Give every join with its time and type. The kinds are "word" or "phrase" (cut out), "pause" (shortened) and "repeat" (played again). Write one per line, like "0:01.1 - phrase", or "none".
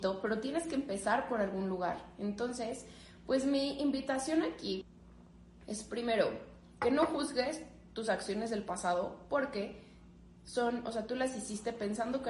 none